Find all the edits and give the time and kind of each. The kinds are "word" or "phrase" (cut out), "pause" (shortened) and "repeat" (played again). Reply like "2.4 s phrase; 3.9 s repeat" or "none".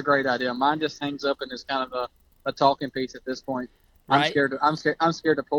none